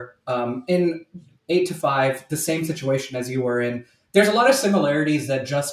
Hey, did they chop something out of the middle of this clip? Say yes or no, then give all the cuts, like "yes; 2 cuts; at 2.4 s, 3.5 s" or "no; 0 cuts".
no; 0 cuts